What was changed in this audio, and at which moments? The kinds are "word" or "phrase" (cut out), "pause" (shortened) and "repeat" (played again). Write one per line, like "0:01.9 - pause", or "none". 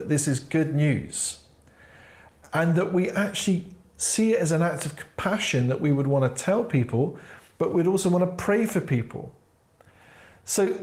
none